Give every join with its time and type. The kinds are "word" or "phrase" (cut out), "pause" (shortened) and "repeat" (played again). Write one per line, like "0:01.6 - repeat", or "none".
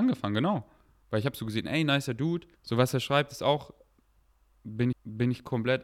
0:02.6 - pause
0:04.9 - repeat

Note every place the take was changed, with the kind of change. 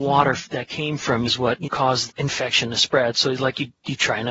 0:01.3 - word
0:01.6 - word
0:02.1 - word

